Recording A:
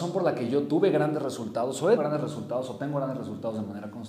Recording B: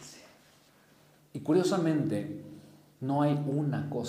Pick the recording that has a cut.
A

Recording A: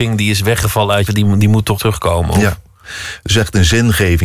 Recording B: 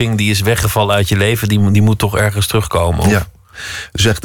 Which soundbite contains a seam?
A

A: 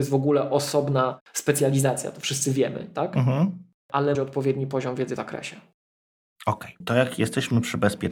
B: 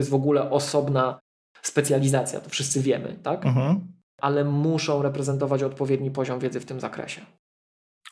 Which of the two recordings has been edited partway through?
A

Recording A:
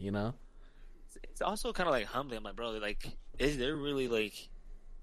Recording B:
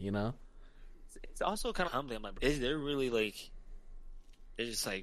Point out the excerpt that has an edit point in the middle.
B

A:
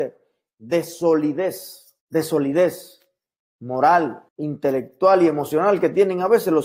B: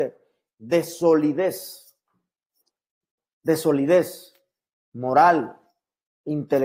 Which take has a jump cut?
A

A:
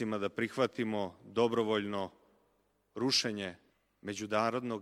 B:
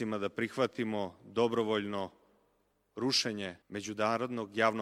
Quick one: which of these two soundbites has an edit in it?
B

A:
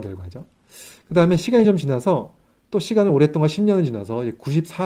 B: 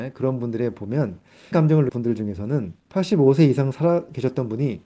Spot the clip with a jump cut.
B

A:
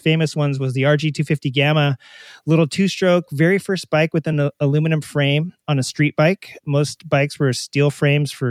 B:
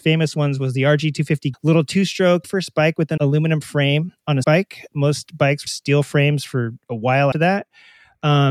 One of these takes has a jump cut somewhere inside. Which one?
B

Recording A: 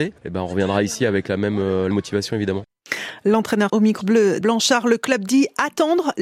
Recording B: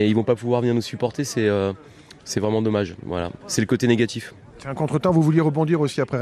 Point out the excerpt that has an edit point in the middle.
A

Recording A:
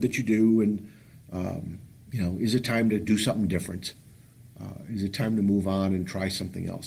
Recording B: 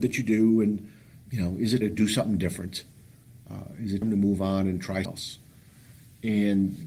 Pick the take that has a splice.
B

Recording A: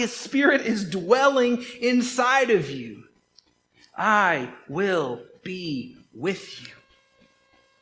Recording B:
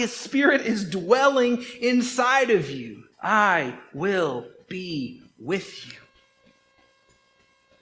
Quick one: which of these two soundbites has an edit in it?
B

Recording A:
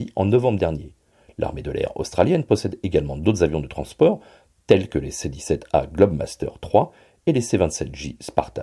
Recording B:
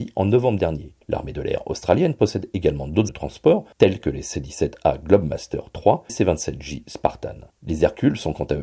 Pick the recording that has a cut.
B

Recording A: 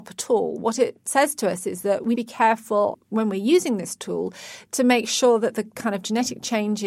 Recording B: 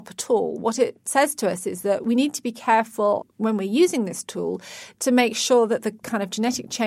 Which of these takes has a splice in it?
A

